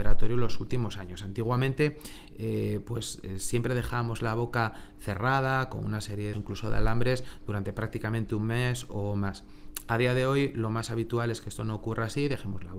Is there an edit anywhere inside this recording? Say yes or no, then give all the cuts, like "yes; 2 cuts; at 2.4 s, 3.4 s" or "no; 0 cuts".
yes; 1 cut; at 6.3 s